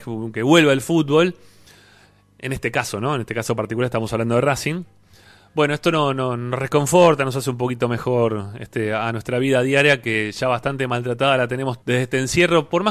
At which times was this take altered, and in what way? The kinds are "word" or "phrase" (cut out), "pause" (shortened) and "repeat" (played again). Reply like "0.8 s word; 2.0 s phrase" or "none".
11.8 s word